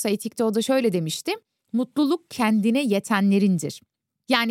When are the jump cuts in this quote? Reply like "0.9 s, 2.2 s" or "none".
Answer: none